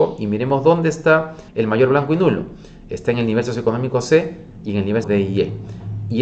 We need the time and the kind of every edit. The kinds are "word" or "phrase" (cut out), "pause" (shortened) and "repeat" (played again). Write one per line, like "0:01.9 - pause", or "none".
0:01.5 - pause
0:05.0 - word